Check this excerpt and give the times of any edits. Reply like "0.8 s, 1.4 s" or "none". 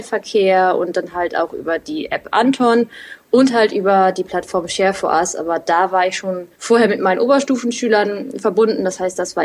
6.5 s